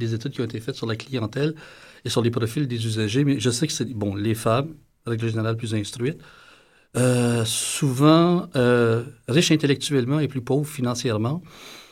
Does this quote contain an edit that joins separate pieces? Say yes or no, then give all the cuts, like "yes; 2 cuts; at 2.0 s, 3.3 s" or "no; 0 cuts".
no; 0 cuts